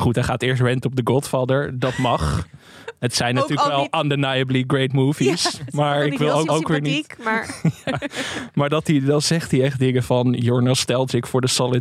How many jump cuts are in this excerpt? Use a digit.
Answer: 1